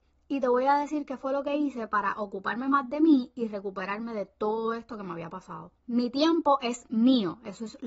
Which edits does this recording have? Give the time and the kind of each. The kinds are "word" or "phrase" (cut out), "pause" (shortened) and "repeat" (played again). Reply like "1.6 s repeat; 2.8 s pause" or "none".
5.8 s pause

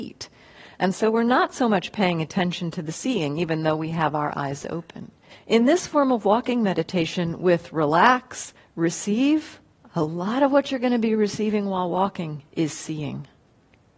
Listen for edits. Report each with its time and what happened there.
5.3 s pause; 9.8 s pause; 12.5 s pause

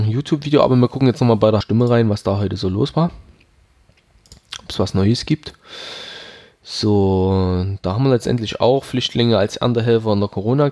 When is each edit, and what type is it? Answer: 1.6 s word

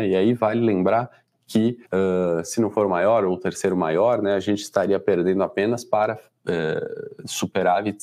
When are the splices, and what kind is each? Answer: 1.8 s pause

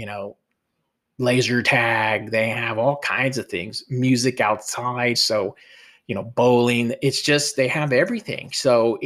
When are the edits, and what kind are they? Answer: none

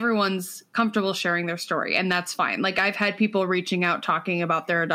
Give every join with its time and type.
none

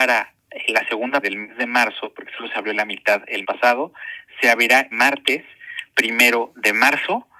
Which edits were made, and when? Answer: 1.2 s word; 3.4 s word; 4.9 s word

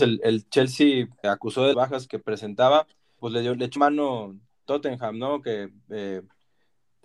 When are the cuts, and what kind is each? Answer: 1.2 s word; 1.7 s word; 2.1 s word; 3.2 s word; 3.8 s word; 4.7 s word

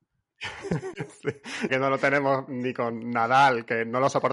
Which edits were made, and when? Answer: 1.7 s word

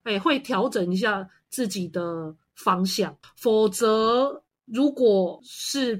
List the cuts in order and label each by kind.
3.2 s pause

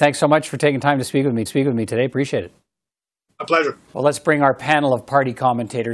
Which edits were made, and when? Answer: 1.5 s repeat; 3.8 s pause

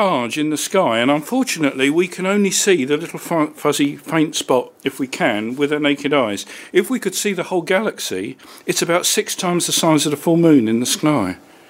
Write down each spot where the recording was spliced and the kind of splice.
4.8 s pause

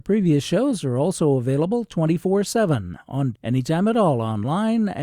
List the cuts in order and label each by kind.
3.3 s word

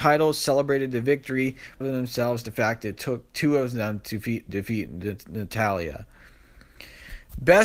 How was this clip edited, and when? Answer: 1.8 s word; 2.4 s word; 4.5 s word

